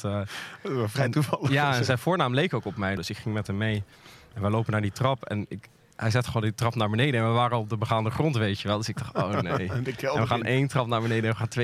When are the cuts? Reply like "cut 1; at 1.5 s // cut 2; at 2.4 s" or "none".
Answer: none